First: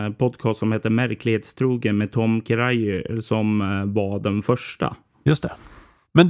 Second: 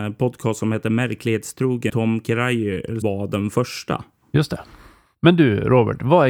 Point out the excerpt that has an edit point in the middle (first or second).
second